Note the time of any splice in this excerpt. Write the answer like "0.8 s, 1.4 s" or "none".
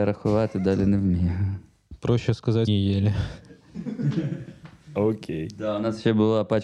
2.7 s